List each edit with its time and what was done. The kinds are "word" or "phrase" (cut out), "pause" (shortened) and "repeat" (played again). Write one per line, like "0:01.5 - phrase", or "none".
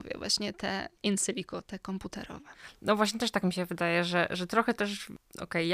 none